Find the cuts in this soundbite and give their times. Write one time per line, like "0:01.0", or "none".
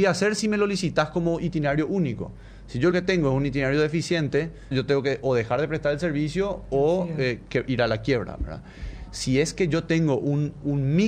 0:02.9
0:04.7